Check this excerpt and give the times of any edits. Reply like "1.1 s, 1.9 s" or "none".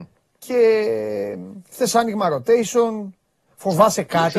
none